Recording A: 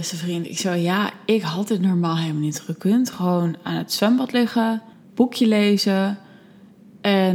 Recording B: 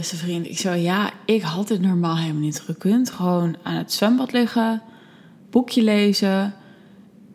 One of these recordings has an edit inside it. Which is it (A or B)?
A